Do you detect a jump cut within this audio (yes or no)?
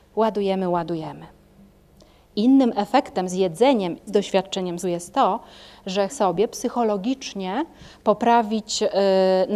yes